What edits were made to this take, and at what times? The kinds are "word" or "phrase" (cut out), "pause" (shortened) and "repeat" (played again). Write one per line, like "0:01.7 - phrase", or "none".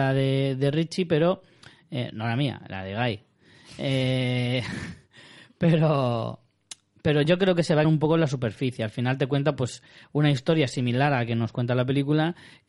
0:07.8 - word